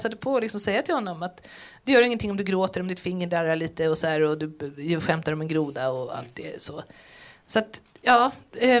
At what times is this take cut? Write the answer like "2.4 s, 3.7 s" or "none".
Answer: none